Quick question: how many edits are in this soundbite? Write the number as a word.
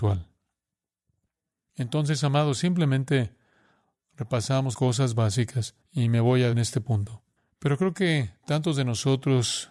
four